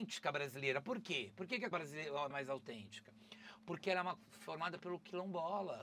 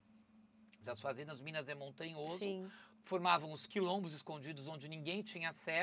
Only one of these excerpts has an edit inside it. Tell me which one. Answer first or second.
first